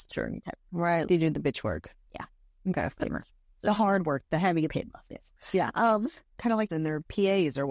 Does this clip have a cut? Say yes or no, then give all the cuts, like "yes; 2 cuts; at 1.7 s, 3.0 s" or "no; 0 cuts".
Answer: yes; 5 cuts; at 1.1 s, 2.1 s, 3.3 s, 4.7 s, 6.7 s